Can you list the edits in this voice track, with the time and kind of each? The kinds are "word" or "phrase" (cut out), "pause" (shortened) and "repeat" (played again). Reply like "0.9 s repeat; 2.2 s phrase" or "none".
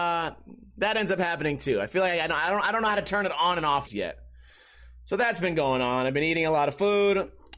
3.9 s word